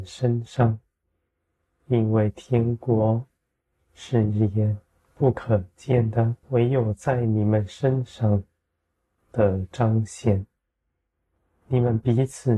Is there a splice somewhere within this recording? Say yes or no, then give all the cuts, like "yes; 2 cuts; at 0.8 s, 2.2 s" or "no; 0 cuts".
yes; 1 cut; at 6.4 s